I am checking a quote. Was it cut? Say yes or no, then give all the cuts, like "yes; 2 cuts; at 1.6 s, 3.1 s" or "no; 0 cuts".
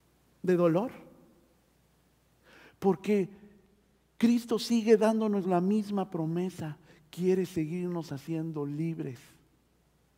no; 0 cuts